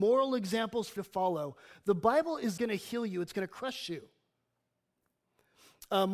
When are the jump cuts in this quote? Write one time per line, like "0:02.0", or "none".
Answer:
0:01.0
0:02.6